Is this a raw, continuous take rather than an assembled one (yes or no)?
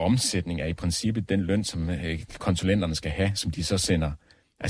yes